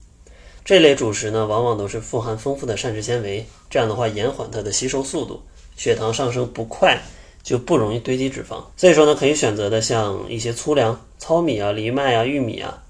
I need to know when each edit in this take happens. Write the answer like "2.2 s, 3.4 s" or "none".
8.7 s